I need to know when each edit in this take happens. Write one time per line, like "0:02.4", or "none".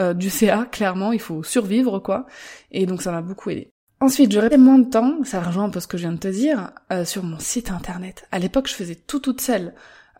0:04.5